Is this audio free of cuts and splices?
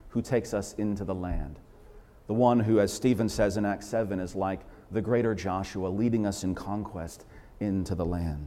yes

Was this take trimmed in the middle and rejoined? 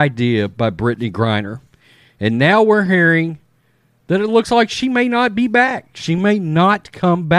no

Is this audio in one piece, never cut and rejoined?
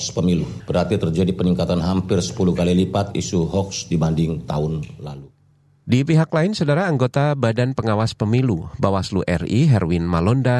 yes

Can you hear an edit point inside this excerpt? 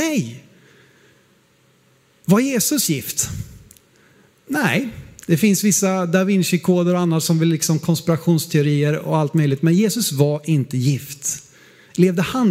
no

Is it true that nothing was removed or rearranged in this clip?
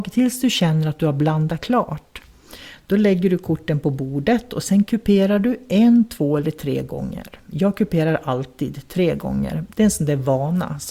yes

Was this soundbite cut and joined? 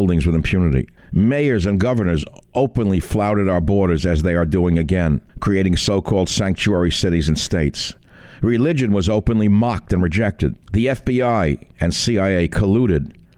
yes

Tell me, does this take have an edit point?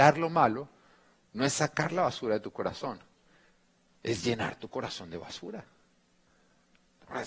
no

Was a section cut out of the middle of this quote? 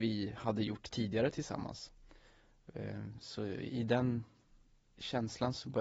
no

